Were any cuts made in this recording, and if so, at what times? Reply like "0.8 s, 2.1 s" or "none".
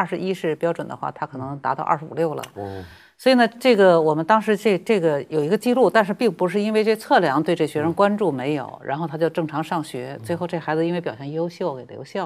none